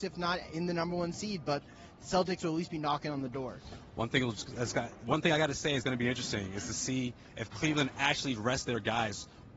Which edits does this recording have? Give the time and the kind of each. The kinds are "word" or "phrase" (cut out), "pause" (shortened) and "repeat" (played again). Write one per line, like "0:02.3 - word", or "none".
none